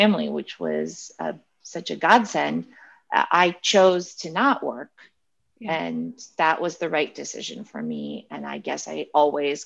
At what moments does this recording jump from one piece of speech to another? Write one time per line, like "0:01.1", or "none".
none